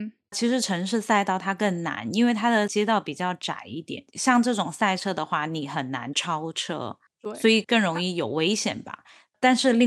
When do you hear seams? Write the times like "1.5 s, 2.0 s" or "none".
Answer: 4.1 s